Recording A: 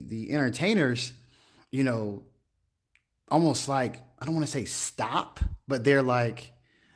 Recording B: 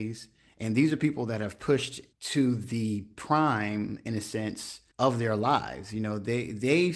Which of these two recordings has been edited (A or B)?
B